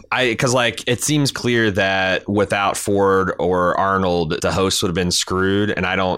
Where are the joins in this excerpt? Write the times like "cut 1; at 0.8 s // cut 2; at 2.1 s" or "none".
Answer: cut 1; at 1.3 s // cut 2; at 4.4 s